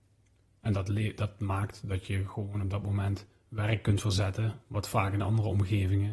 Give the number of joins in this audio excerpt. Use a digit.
0